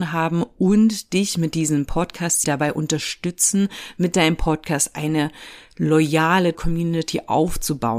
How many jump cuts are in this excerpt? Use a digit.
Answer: 2